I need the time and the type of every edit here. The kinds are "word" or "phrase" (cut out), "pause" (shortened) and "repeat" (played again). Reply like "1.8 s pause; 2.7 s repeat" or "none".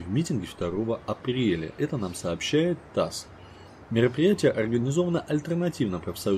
none